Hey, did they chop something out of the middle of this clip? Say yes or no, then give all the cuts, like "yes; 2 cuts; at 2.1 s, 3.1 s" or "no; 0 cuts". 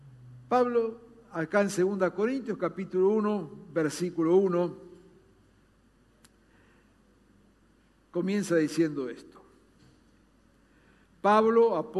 no; 0 cuts